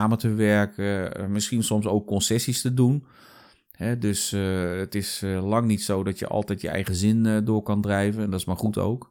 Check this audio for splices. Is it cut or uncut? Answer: uncut